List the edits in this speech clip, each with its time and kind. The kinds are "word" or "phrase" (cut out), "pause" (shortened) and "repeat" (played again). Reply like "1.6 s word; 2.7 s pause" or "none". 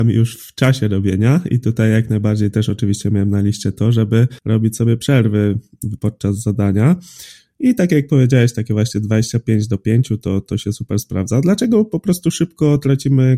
4.4 s pause